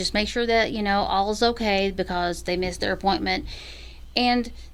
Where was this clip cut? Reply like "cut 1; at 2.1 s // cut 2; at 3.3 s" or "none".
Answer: none

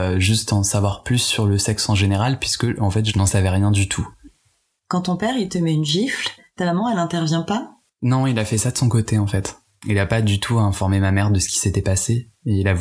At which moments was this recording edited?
cut 1; at 7.9 s

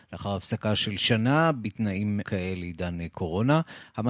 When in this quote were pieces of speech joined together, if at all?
cut 1; at 2.2 s

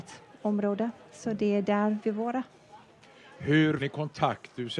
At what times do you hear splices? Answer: cut 1; at 2.0 s // cut 2; at 3.8 s

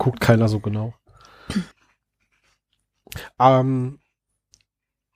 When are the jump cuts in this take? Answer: cut 1; at 1.7 s

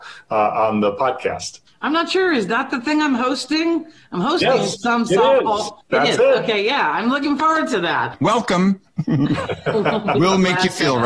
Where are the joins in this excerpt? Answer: cut 1; at 1.7 s // cut 2; at 5.8 s

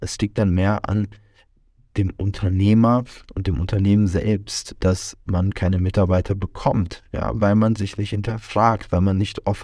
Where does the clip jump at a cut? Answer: none

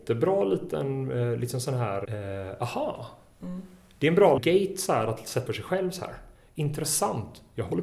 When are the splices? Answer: cut 1; at 2.0 s // cut 2; at 4.4 s // cut 3; at 5.5 s

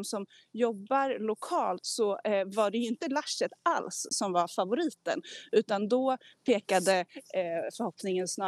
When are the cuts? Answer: none

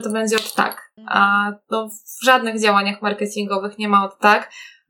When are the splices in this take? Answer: cut 1; at 1.0 s

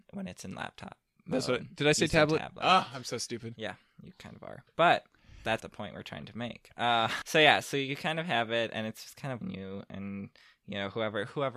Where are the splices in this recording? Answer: cut 1; at 5.6 s // cut 2; at 7.2 s // cut 3; at 7.6 s // cut 4; at 9.4 s

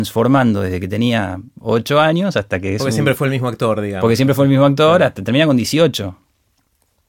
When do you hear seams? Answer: none

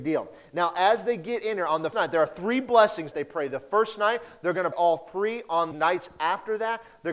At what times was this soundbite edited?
cut 1; at 1.9 s // cut 2; at 3.1 s // cut 3; at 4.7 s // cut 4; at 5.7 s

